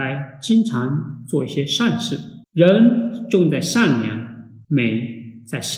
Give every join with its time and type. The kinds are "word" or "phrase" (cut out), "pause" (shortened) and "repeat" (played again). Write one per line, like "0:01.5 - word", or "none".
0:02.4 - pause
0:04.6 - pause

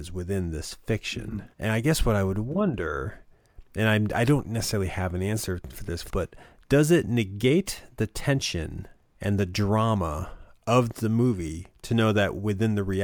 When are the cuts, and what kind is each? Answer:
0:01.5 - pause
0:06.1 - word
0:09.0 - pause

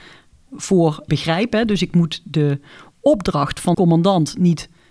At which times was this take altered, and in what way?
0:01.1 - phrase
0:03.7 - word

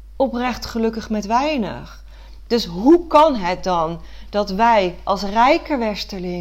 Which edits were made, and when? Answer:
none

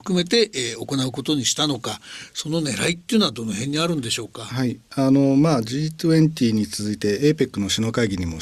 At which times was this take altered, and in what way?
none

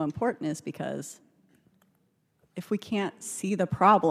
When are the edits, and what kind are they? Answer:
none

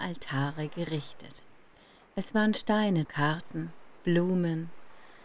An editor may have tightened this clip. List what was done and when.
0:01.7 - pause
0:03.0 - word

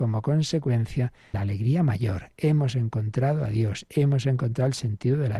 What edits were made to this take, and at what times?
0:01.3 - word

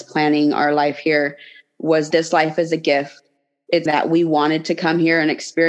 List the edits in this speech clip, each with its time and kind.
0:02.1 - word
0:03.9 - word

